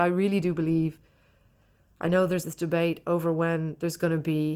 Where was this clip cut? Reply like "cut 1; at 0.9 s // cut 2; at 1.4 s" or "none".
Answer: cut 1; at 2.4 s